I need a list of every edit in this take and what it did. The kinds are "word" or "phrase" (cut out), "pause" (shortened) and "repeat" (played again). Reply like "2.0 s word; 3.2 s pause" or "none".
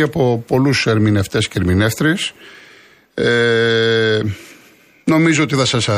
none